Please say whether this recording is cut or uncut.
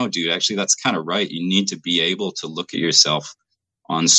uncut